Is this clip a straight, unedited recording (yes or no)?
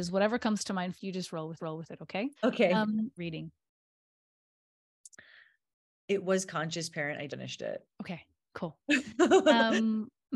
no